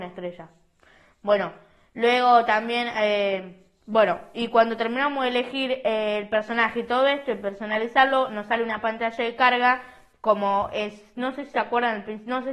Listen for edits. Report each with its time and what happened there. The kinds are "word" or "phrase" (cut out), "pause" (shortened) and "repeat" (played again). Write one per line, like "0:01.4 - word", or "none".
none